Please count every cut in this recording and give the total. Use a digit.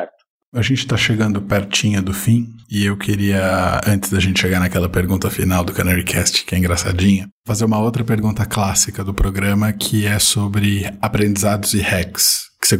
1